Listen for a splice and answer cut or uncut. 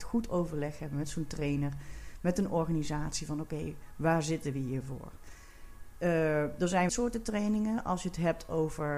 cut